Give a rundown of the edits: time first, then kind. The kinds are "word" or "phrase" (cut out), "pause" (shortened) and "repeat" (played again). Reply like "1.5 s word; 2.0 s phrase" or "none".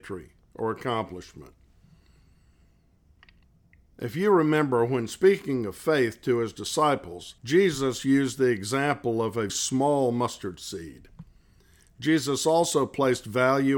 7.4 s pause; 9.5 s word

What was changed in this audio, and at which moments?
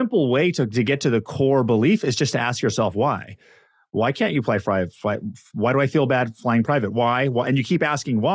none

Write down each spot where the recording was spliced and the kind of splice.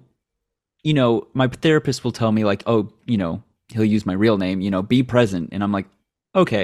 none

